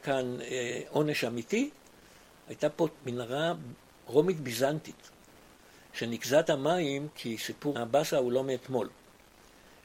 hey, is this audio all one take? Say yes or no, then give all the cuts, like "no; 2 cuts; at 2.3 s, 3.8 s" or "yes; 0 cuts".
yes; 0 cuts